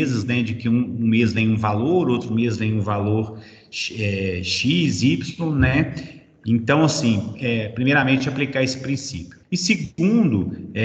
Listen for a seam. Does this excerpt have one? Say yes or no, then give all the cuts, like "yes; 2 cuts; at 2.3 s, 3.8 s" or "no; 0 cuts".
yes; 1 cut; at 9.4 s